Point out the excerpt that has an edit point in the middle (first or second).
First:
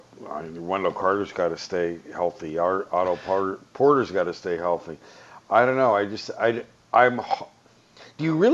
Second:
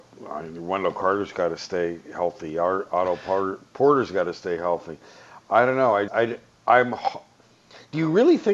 second